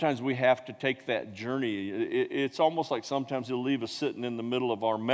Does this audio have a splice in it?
no; 0 cuts

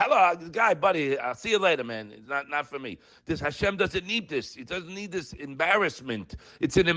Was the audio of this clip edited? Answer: no; 0 cuts

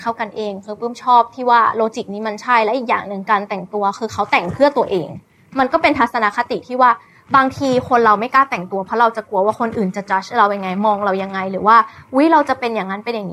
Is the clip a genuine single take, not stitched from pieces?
yes; 0 cuts

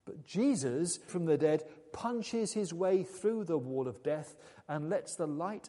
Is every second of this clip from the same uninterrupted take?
no; 1 cut; at 1.1 s

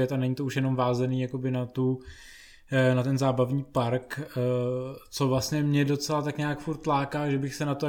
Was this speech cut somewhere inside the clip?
no; 0 cuts

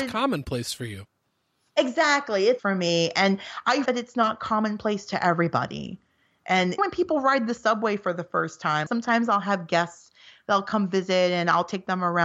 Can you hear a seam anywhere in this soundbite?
yes; 4 cuts; at 2.6 s, 3.9 s, 6.8 s, 8.9 s

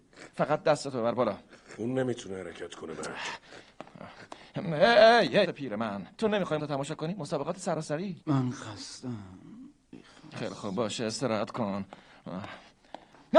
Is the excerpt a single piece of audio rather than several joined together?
no; 4 cuts; at 5.4 s, 6.1 s, 6.6 s, 8.2 s

